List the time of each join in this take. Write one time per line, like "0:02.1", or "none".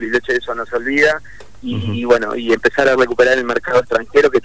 none